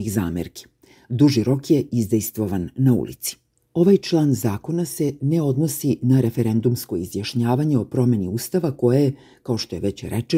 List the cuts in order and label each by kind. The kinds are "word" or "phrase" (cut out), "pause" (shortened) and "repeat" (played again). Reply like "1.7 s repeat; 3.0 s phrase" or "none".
3.6 s pause